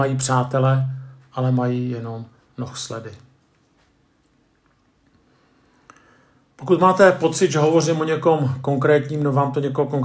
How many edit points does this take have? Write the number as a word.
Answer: zero